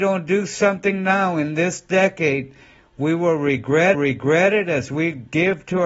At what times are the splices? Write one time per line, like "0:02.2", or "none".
0:03.9

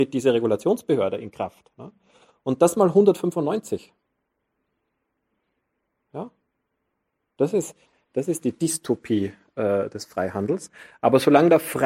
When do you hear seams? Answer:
none

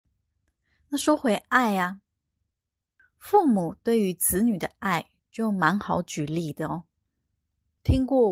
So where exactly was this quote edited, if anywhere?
0:05.2

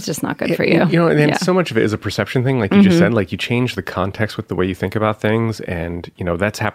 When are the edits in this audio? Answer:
none

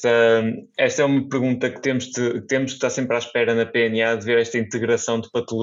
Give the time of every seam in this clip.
none

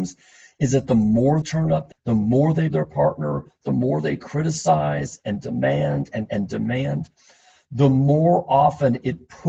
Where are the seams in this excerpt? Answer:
0:01.4
0:01.9
0:02.7
0:06.3

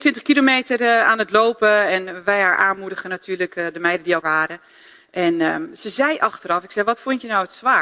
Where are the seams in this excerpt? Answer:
0:04.2

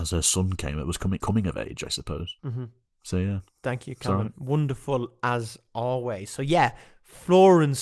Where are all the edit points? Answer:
0:01.2
0:02.4

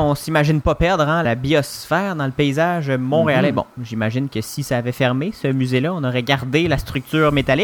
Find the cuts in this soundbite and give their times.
0:01.2

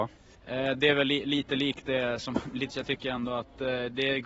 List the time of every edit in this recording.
0:02.7

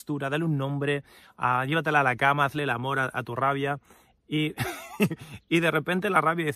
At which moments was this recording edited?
none

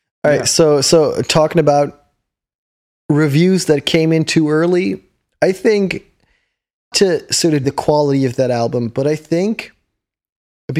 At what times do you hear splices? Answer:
0:06.9
0:07.6

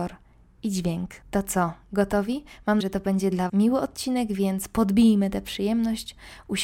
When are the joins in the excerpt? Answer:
0:01.2
0:02.8
0:03.5

